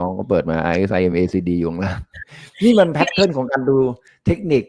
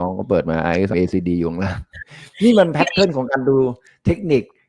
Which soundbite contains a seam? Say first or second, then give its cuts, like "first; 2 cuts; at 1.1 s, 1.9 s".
second; 1 cut; at 0.9 s